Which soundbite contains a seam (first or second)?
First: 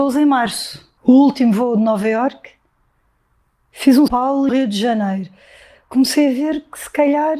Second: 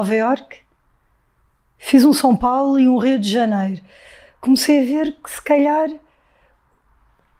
first